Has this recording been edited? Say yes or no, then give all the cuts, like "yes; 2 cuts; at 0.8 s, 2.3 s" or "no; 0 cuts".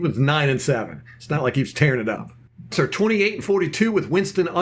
yes; 1 cut; at 2.7 s